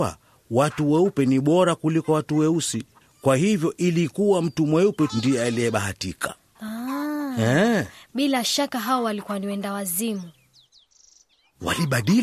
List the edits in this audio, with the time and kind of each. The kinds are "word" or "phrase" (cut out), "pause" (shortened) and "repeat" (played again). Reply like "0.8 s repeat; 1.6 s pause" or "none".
3.0 s pause; 5.1 s word